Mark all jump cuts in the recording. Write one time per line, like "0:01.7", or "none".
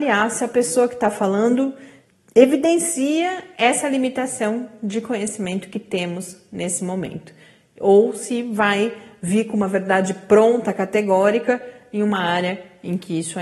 none

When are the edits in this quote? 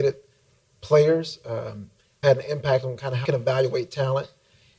0:02.2
0:03.2

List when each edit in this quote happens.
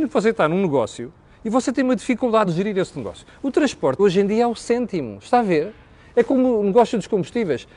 0:02.4
0:04.0

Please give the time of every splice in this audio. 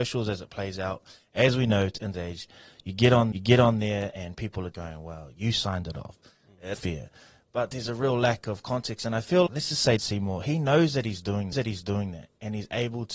0:02.1
0:03.3
0:04.7
0:06.7
0:09.5
0:10.0
0:11.5

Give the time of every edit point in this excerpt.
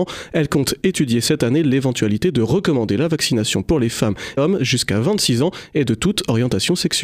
0:04.4

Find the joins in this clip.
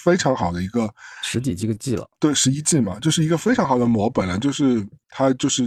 0:02.1

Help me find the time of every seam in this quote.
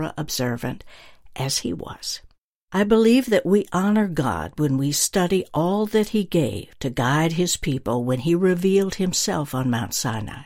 0:02.4

